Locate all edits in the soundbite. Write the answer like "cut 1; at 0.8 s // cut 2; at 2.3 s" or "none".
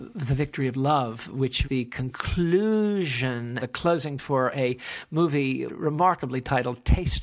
cut 1; at 1.7 s // cut 2; at 3.6 s // cut 3; at 4.2 s // cut 4; at 5.7 s